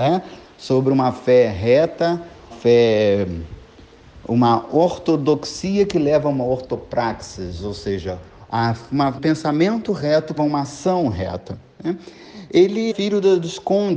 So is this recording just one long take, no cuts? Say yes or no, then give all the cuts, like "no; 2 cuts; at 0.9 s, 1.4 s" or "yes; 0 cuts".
no; 4 cuts; at 2.5 s, 9.2 s, 10.4 s, 12.9 s